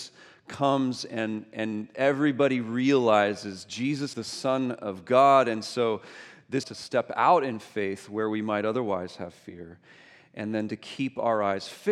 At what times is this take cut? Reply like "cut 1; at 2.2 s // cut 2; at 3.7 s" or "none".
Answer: cut 1; at 4.1 s // cut 2; at 6.6 s